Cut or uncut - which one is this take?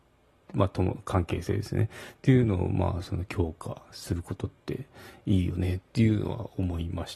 uncut